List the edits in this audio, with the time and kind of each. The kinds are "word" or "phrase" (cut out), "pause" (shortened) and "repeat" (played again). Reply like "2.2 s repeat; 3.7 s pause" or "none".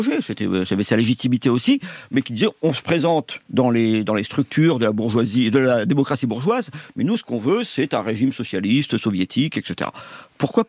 3.4 s pause